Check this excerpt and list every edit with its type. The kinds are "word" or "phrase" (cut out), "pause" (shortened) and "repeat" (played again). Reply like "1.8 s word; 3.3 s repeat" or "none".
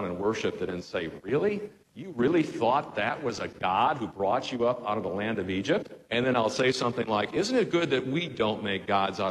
1.8 s pause; 6.0 s pause